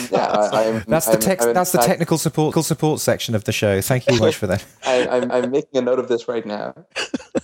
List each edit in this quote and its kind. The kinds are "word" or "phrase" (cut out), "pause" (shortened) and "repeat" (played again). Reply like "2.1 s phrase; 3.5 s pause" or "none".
2.5 s repeat; 4.2 s word; 5.3 s repeat

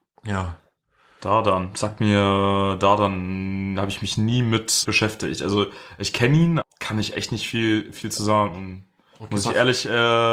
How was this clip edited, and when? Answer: 4.8 s word; 6.6 s word

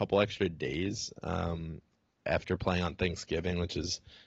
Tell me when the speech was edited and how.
none

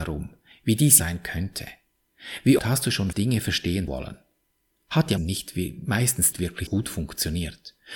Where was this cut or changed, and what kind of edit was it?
1.0 s word; 2.6 s word; 3.1 s word; 3.9 s word; 5.2 s word; 6.3 s word; 6.7 s word

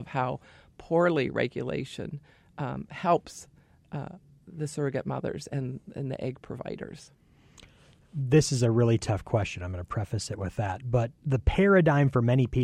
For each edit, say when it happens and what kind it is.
none

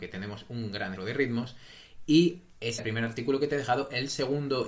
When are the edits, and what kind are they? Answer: 1.0 s word; 2.8 s word

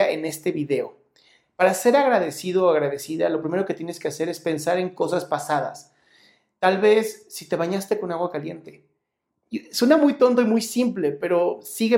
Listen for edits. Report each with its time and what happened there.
none

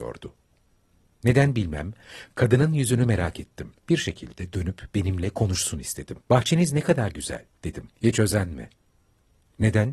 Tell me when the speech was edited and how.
3.8 s pause; 6.2 s pause; 8.0 s pause

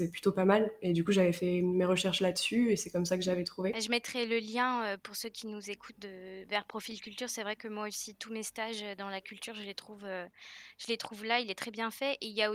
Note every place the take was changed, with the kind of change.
none

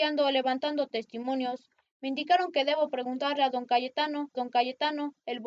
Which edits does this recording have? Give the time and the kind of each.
4.3 s repeat

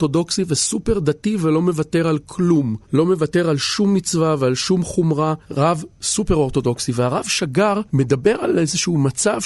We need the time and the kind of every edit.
2.8 s pause; 5.4 s pause; 7.9 s pause

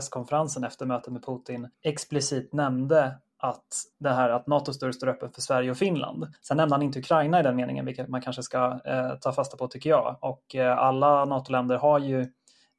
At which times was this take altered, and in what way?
1.7 s pause; 3.9 s pause; 6.4 s pause

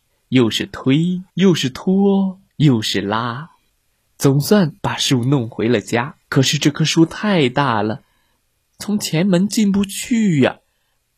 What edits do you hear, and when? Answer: 1.3 s pause; 2.5 s pause; 3.7 s pause; 4.8 s pause; 6.2 s pause

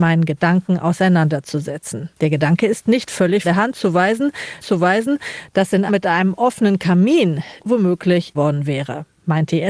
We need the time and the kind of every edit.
2.1 s pause; 3.4 s word; 4.6 s repeat; 5.9 s phrase; 7.6 s phrase; 8.3 s phrase

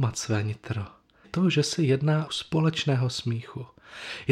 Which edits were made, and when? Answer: 1.2 s word; 2.3 s phrase

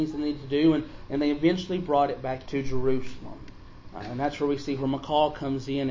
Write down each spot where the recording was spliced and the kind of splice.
2.5 s word

